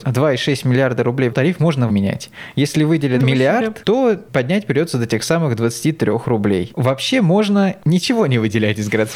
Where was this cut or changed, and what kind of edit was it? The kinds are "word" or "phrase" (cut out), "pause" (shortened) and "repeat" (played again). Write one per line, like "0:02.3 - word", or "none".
0:01.3 - phrase
0:01.9 - phrase
0:03.2 - word